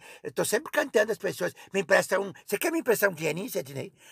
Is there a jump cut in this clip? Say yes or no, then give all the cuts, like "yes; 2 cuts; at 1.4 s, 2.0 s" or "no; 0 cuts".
no; 0 cuts